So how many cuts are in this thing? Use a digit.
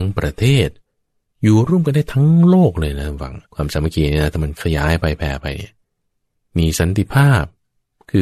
1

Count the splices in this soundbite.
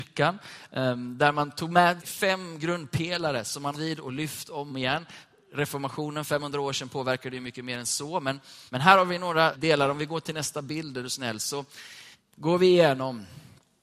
6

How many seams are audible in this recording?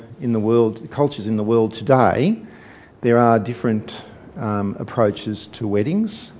0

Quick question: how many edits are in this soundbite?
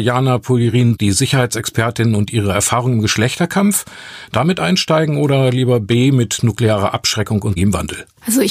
1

